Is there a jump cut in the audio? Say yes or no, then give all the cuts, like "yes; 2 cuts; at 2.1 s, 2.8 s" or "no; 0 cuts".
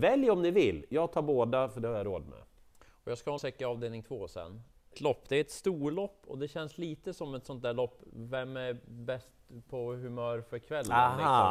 yes; 2 cuts; at 3.4 s, 4.9 s